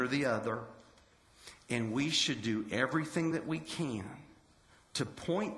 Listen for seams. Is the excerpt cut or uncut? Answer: uncut